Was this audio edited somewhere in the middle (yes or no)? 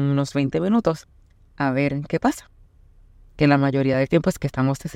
no